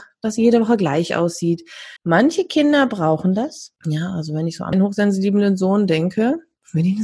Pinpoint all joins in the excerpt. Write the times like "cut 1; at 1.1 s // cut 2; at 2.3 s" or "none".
cut 1; at 2.0 s // cut 2; at 3.8 s // cut 3; at 4.7 s

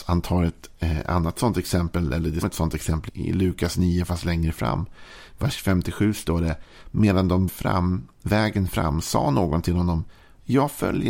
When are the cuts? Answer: cut 1; at 2.4 s // cut 2; at 3.1 s // cut 3; at 7.5 s

